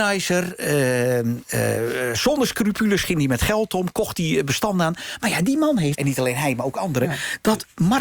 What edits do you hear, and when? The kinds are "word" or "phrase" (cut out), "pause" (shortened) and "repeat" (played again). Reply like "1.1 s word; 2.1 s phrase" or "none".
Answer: 6.0 s phrase